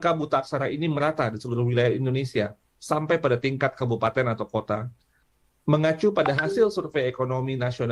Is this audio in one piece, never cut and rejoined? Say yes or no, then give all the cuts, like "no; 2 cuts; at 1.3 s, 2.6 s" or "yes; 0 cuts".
yes; 0 cuts